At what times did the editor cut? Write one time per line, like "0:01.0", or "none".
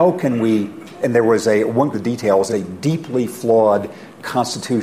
0:01.0
0:01.9
0:02.5